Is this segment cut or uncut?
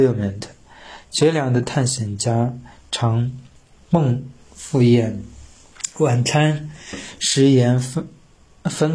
uncut